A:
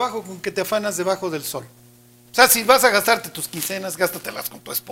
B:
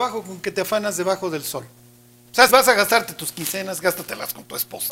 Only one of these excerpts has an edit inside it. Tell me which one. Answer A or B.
B